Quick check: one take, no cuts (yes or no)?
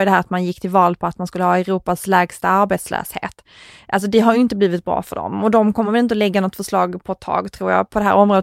yes